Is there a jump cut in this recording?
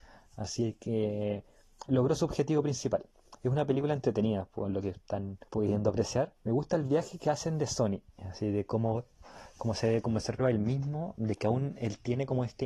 yes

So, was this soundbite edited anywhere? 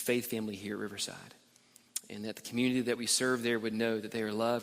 no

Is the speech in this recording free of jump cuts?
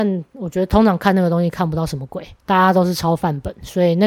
no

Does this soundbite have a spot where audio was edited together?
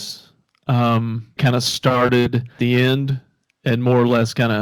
yes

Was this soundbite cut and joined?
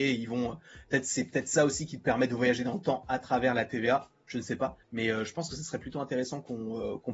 yes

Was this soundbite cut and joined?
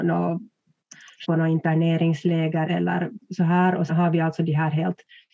yes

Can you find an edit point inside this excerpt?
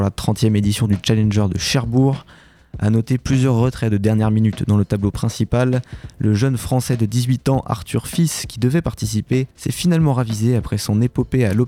yes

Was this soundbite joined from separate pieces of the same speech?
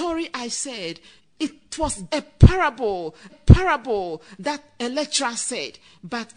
yes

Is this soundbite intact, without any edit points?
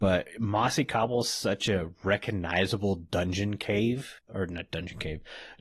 no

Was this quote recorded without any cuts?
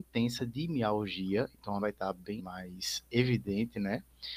no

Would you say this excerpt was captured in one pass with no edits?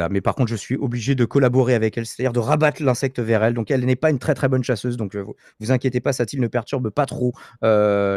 yes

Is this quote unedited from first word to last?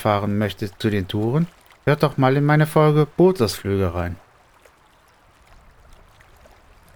yes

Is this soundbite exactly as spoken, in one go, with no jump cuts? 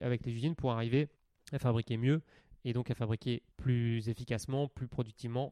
no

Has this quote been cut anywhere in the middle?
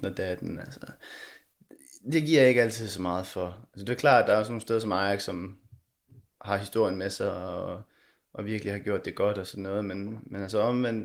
no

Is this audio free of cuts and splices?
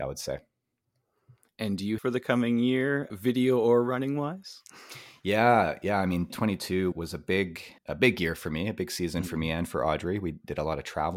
no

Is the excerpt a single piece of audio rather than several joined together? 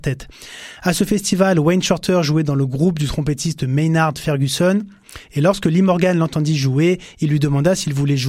yes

